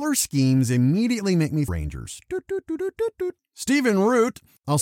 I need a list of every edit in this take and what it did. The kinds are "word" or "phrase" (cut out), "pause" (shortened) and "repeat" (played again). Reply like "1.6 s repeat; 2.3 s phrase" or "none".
1.7 s phrase